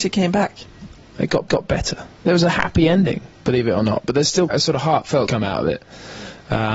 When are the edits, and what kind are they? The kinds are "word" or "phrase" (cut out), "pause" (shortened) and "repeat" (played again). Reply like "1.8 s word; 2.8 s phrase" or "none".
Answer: 1.5 s repeat; 3.3 s pause; 4.5 s word; 5.3 s phrase